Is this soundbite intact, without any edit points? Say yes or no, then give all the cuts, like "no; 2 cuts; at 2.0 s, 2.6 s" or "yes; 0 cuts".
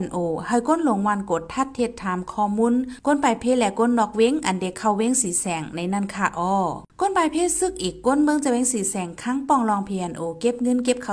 no; 1 cut; at 6.9 s